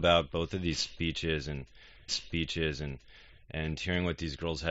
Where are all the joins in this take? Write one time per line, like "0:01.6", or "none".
0:02.1